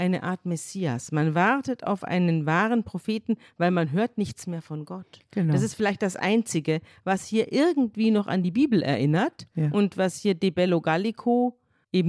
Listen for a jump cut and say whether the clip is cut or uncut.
uncut